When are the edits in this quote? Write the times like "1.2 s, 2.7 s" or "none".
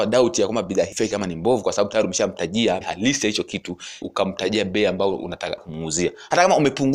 0.9 s, 2.8 s, 4.0 s, 5.6 s